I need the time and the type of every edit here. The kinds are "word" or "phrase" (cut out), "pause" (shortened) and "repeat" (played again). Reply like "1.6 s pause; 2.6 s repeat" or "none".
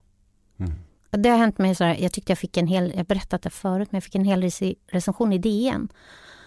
1.0 s pause